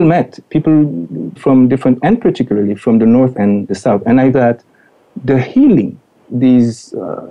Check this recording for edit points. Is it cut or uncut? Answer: cut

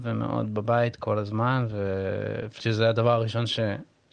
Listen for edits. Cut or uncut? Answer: cut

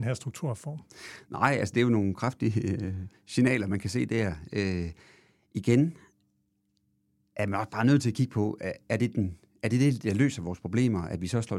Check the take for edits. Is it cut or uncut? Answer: uncut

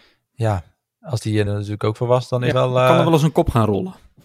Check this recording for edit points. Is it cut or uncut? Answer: cut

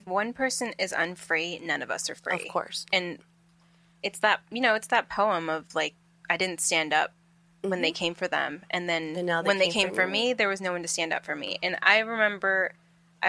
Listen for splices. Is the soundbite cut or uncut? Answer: uncut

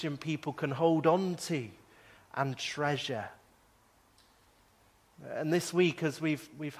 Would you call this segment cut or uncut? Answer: uncut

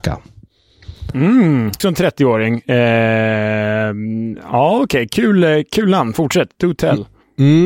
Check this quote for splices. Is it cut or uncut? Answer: cut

